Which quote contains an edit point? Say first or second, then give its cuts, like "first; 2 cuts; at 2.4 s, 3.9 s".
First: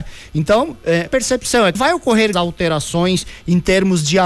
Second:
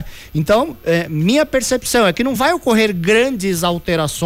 first; 3 cuts; at 1.1 s, 1.7 s, 2.3 s